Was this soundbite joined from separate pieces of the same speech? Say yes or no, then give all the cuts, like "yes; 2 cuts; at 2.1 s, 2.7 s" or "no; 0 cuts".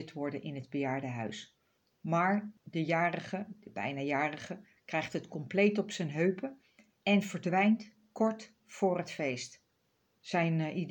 no; 0 cuts